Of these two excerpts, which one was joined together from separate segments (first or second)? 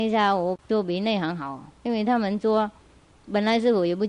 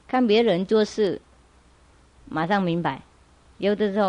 first